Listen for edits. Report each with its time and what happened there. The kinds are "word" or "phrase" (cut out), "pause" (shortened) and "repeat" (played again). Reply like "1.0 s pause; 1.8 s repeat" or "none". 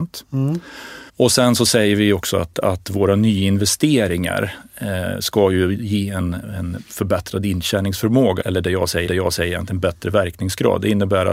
1.1 s pause; 8.4 s word; 9.1 s repeat